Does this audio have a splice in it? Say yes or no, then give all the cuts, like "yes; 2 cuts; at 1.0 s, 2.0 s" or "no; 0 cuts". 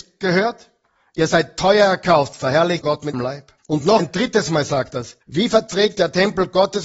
yes; 6 cuts; at 2.8 s, 3.1 s, 3.6 s, 4.0 s, 5.2 s, 5.9 s